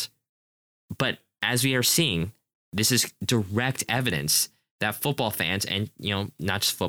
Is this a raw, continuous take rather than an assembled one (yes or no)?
yes